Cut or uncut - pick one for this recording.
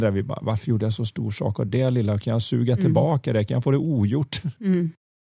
uncut